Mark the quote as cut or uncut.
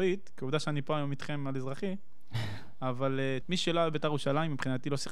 cut